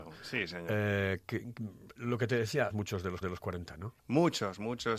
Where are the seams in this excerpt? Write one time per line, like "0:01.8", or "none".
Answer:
0:02.7
0:03.2
0:04.0

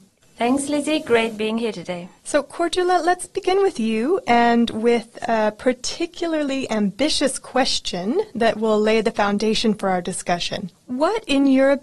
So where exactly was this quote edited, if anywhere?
0:02.2

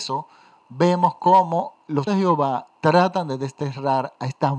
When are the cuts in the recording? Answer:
0:02.1
0:02.8

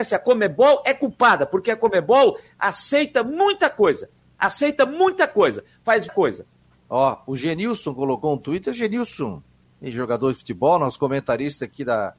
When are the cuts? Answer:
0:06.1

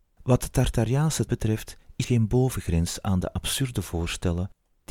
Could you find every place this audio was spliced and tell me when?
0:01.3
0:02.0

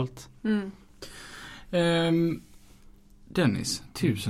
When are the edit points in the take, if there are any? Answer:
none

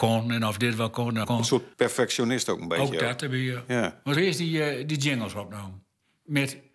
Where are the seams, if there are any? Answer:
0:01.2
0:01.7
0:04.2

